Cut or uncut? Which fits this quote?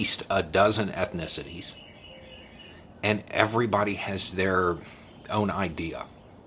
uncut